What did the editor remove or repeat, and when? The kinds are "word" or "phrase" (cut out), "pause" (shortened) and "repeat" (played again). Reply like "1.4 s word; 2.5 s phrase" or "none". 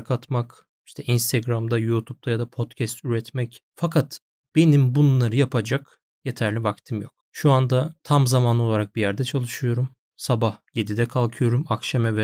3.7 s pause; 7.2 s pause; 8.0 s pause; 10.7 s pause